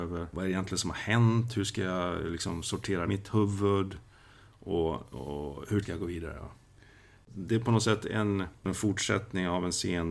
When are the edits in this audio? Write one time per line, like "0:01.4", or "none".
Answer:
0:03.1
0:05.8